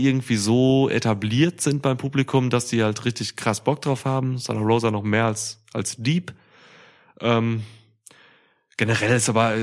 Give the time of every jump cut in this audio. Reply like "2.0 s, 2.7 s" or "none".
none